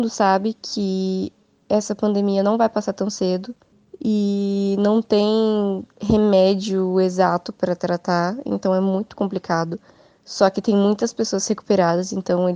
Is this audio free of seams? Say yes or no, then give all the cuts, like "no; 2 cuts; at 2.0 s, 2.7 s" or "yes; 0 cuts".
yes; 0 cuts